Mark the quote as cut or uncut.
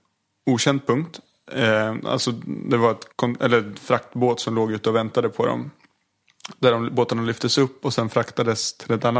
cut